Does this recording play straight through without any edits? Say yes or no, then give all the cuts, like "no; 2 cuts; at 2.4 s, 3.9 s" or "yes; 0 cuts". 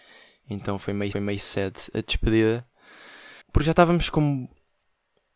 no; 2 cuts; at 1.1 s, 3.4 s